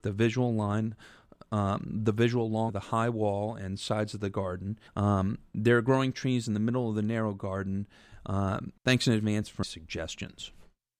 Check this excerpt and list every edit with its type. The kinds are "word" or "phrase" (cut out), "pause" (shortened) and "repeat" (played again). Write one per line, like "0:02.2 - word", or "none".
0:02.7 - word
0:04.9 - pause
0:08.8 - pause
0:09.6 - word